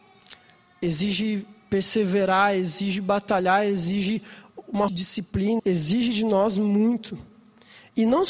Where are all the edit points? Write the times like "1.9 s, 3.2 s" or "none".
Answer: 4.9 s, 5.6 s